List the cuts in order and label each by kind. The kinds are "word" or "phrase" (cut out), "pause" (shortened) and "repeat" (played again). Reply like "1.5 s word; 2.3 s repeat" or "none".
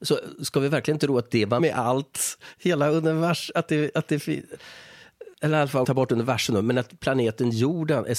1.6 s word; 5.3 s pause; 5.8 s word